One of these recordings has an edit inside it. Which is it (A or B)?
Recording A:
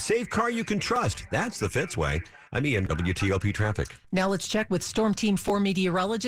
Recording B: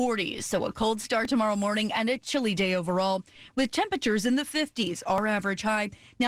A